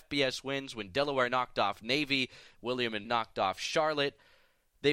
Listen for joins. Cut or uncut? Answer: cut